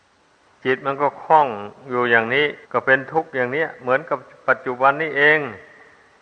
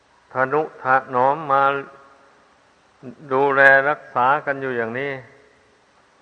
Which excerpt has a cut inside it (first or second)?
first